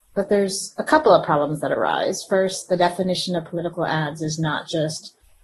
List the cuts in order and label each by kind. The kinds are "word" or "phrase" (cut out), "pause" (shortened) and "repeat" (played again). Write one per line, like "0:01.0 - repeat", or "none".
none